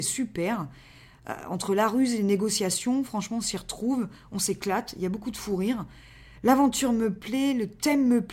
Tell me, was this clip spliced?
no; 0 cuts

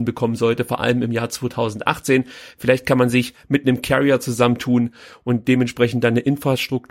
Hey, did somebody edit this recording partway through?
no; 0 cuts

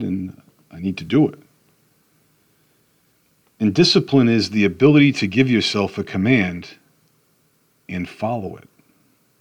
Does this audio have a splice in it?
no; 0 cuts

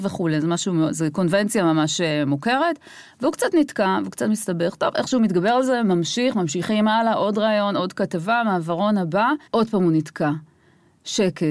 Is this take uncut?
no; 1 cut; at 9.5 s

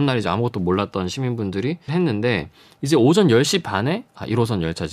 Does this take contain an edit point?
yes; 1 cut; at 1.9 s

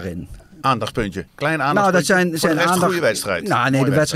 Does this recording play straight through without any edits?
no; 1 cut; at 1.3 s

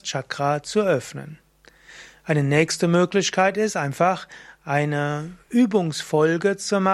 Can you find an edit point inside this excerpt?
no; 0 cuts

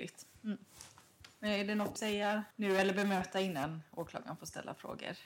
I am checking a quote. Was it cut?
yes; 3 cuts; at 1.3 s, 2.0 s, 2.5 s

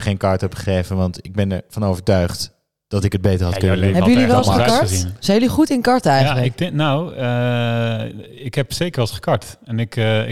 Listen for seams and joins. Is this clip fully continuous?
yes; 0 cuts

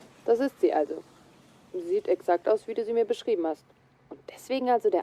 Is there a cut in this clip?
no; 0 cuts

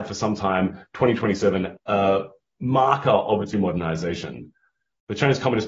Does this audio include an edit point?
yes; 2 cuts; at 1.8 s, 3.5 s

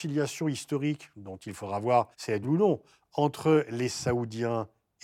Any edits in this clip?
yes; 2 cuts; at 2.1 s, 2.4 s

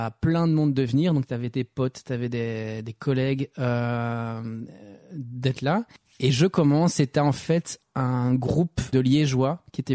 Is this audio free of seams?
no; 1 cut; at 8.9 s

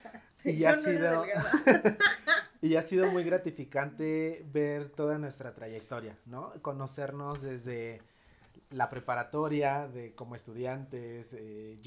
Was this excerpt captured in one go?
yes; 0 cuts

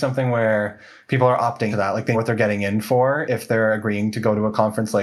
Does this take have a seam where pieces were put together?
yes; 2 cuts; at 1.7 s, 2.1 s

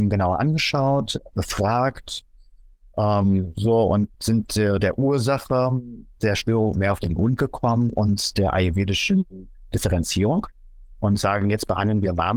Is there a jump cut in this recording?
yes; 1 cut; at 4.1 s

